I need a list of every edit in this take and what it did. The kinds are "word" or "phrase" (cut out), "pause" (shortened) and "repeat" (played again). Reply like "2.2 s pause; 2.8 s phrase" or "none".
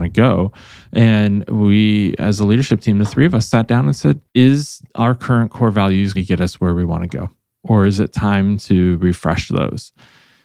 4.3 s pause; 6.1 s word